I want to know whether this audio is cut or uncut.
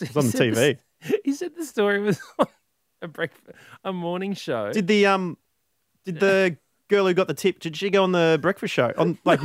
uncut